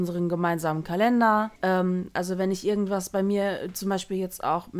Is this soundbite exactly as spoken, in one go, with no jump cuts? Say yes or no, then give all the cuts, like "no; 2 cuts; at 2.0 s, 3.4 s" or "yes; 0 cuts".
no; 1 cut; at 1.6 s